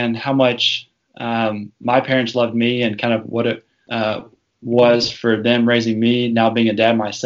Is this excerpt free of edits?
yes; 0 cuts

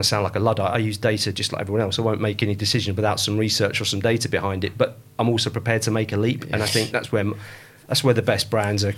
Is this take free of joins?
yes; 0 cuts

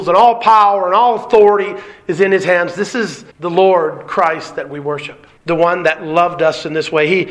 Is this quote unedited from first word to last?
no; 2 cuts; at 3.3 s, 5.4 s

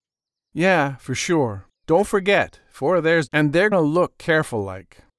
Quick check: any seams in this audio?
yes; 3 cuts; at 1.7 s, 3.3 s, 3.7 s

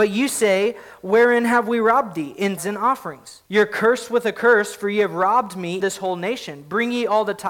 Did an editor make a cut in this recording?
yes; 3 cuts; at 2.6 s, 3.5 s, 5.8 s

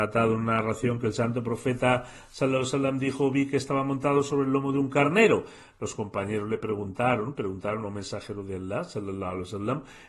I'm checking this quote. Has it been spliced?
no; 0 cuts

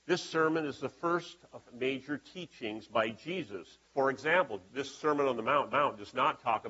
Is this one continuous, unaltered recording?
no; 4 cuts; at 1.7 s, 3.8 s, 4.7 s, 5.7 s

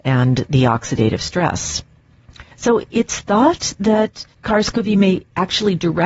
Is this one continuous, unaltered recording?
no; 2 cuts; at 2.5 s, 4.3 s

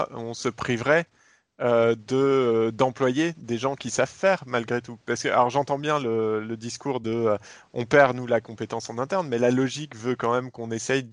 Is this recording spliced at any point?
no; 0 cuts

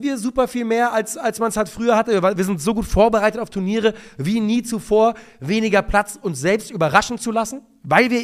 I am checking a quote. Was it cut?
no; 0 cuts

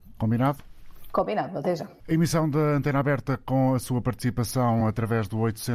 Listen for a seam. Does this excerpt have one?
no; 0 cuts

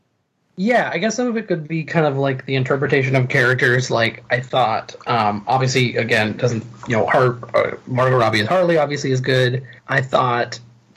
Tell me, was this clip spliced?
yes; 1 cut; at 9.8 s

